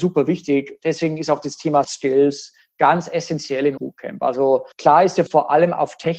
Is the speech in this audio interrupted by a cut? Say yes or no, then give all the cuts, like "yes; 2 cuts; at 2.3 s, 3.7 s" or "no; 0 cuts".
yes; 4 cuts; at 1.8 s, 3.8 s, 4.7 s, 5.3 s